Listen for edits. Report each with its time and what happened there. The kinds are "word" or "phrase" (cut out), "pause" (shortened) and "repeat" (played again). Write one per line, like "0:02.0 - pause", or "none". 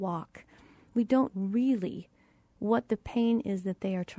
0:01.3 - word